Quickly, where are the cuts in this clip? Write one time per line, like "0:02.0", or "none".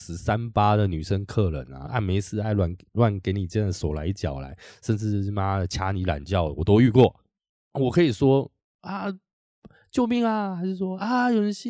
0:01.9

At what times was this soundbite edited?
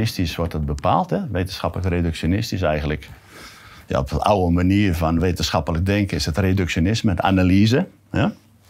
none

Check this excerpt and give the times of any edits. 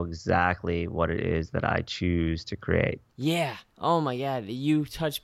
0:03.1

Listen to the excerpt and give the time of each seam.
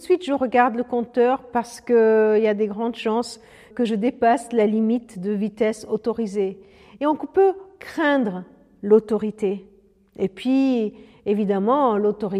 0:03.7

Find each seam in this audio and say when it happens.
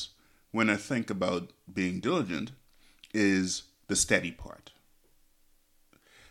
none

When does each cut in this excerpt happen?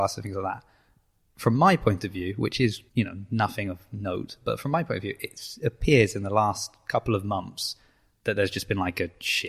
0:02.9

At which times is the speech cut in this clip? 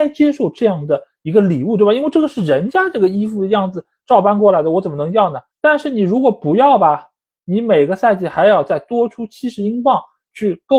none

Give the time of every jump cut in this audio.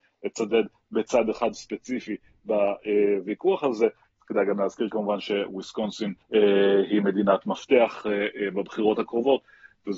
0:06.2

